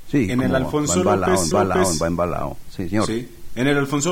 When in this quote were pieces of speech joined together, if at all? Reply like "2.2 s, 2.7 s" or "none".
1.5 s